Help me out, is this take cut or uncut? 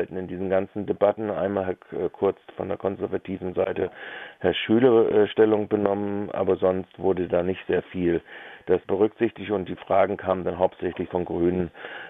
cut